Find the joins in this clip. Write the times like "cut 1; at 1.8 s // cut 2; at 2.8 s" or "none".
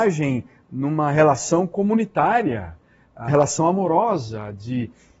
cut 1; at 3.3 s